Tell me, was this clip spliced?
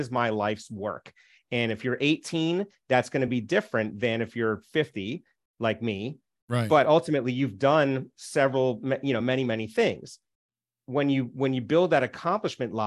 no; 0 cuts

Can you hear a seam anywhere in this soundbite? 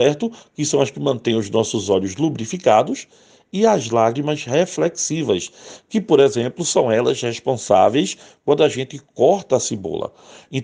no; 0 cuts

